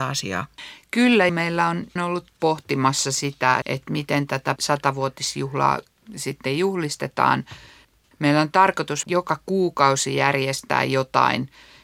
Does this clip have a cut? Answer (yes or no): yes